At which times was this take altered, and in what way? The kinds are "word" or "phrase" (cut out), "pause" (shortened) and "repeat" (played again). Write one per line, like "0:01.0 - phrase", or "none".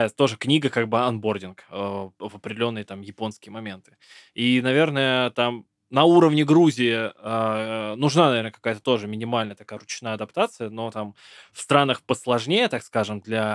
none